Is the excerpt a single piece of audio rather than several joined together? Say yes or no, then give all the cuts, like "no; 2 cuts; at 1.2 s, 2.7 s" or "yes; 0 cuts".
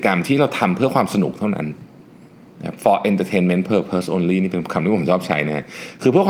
yes; 0 cuts